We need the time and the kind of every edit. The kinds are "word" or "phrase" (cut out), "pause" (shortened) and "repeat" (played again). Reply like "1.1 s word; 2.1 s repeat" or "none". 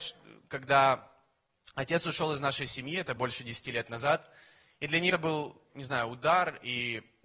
3.2 s word; 5.1 s word; 5.7 s word